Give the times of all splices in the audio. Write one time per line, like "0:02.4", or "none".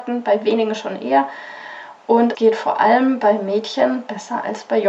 0:02.3